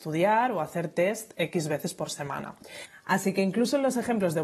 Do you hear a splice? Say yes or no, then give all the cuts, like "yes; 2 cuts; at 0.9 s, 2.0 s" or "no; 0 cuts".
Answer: no; 0 cuts